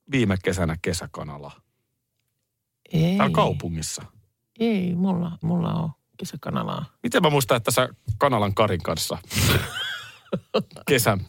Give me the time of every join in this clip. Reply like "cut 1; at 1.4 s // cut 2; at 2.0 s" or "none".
cut 1; at 5.4 s